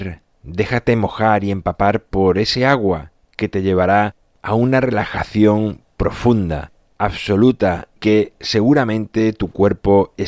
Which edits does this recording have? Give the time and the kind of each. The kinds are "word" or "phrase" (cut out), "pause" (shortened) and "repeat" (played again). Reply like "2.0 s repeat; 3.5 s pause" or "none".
8.0 s word